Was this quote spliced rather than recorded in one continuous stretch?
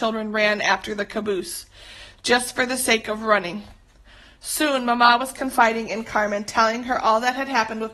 no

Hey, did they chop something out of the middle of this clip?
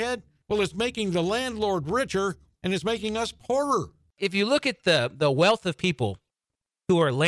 no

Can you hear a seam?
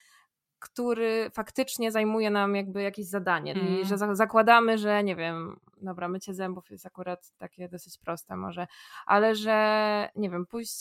yes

